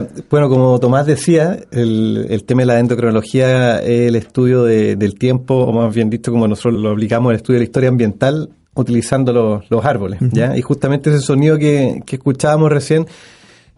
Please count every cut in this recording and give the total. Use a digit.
1